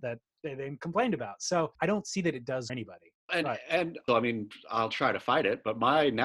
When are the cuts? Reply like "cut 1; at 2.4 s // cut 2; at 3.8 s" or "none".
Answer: cut 1; at 1.7 s // cut 2; at 2.7 s // cut 3; at 3.3 s // cut 4; at 4.1 s